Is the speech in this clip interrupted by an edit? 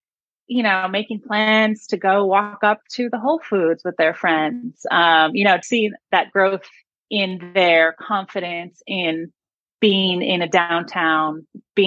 yes; 1 cut; at 5.6 s

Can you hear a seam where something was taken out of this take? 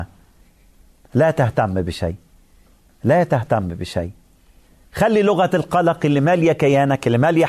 no; 0 cuts

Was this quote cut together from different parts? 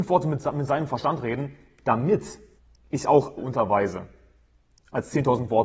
yes; 2 cuts; at 2.6 s, 3.4 s

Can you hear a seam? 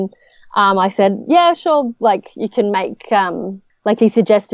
no; 0 cuts

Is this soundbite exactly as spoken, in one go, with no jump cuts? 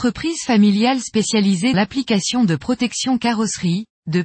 no; 1 cut; at 1.7 s

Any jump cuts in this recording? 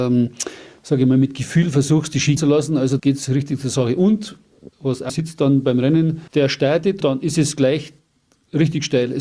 yes; 6 cuts; at 2.4 s, 3.0 s, 4.7 s, 5.1 s, 6.3 s, 7.0 s

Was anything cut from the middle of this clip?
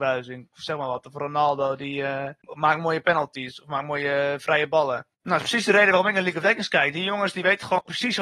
yes; 2 cuts; at 2.4 s, 5.1 s

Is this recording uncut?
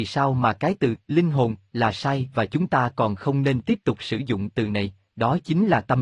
yes; 0 cuts

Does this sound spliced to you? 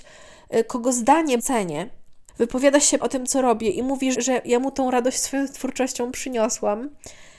yes; 4 cuts; at 1.4 s, 2.3 s, 3.0 s, 4.1 s

